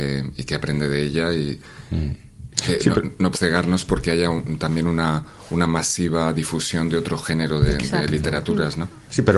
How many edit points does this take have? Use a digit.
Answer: 1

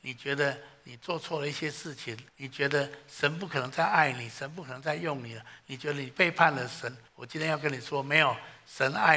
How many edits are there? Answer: 2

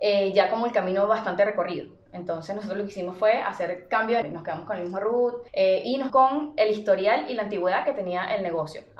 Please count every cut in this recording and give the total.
3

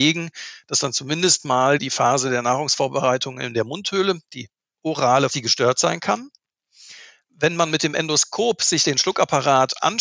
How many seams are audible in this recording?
2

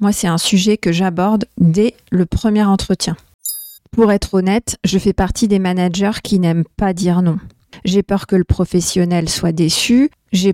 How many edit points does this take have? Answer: 1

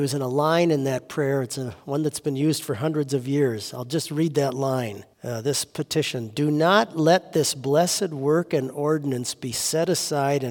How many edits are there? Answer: 1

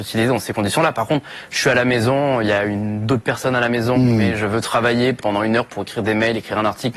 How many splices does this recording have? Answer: 1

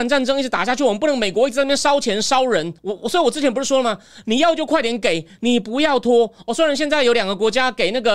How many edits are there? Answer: 1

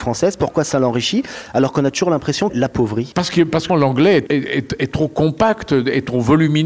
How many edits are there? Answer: 3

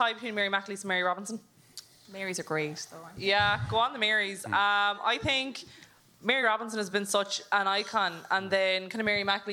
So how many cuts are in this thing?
0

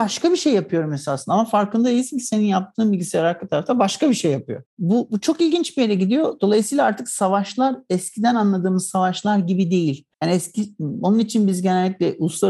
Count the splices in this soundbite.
2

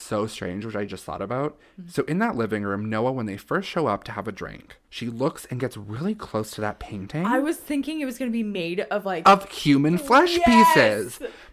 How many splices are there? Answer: 1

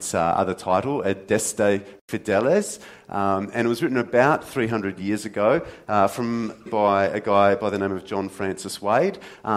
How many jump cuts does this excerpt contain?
1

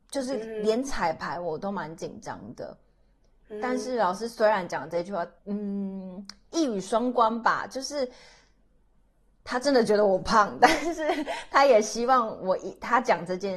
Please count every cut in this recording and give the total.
1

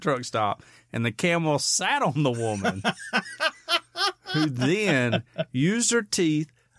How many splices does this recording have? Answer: 0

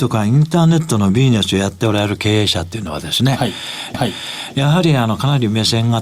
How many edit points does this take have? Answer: 1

